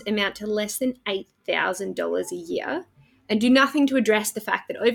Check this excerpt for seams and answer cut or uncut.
uncut